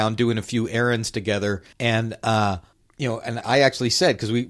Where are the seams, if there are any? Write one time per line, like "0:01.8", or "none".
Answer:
0:01.7
0:02.7
0:03.4